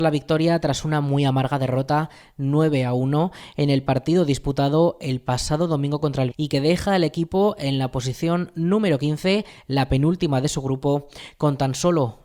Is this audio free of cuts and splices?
no; 1 cut; at 6.3 s

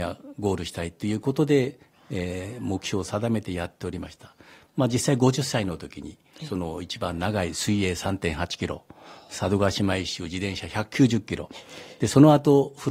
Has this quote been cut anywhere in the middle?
no; 0 cuts

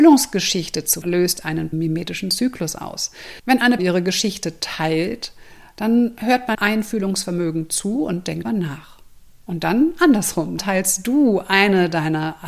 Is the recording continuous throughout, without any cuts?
no; 6 cuts; at 1.0 s, 1.7 s, 3.8 s, 6.5 s, 8.4 s, 10.6 s

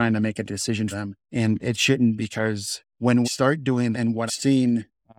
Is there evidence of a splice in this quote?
yes; 6 cuts; at 0.9 s, 1.6 s, 2.2 s, 3.2 s, 3.9 s, 4.3 s

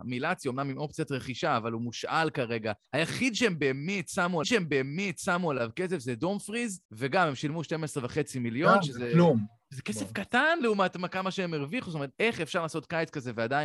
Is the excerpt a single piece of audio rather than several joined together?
no; 4 cuts; at 2.8 s, 4.4 s, 6.8 s, 12.1 s

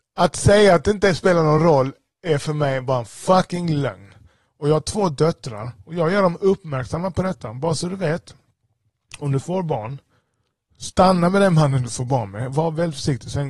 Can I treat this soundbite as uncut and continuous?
yes; 0 cuts

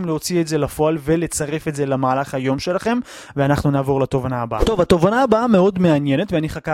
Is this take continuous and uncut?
yes; 0 cuts

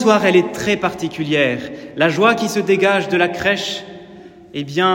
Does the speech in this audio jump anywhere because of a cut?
no; 0 cuts

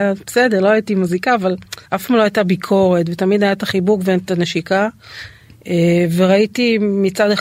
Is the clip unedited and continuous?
no; 1 cut; at 1.9 s

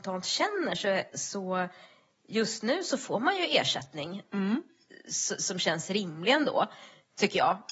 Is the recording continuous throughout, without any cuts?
yes; 0 cuts

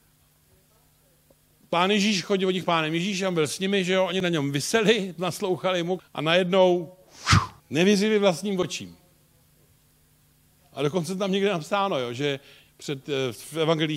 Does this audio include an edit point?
yes; 3 cuts; at 2.6 s, 6.0 s, 7.6 s

